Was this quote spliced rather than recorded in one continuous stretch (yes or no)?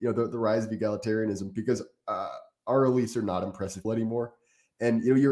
yes